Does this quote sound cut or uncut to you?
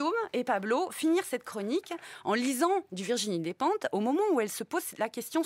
uncut